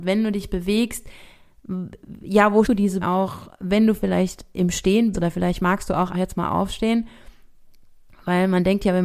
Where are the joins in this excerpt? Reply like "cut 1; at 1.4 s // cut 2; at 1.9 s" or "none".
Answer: cut 1; at 2.6 s // cut 2; at 3.0 s // cut 3; at 5.1 s // cut 4; at 6.1 s